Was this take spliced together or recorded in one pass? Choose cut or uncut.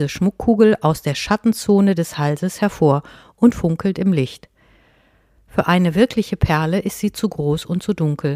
uncut